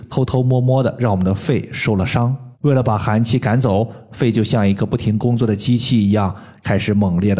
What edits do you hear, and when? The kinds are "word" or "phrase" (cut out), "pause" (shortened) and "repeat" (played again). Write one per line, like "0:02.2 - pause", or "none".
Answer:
0:02.5 - pause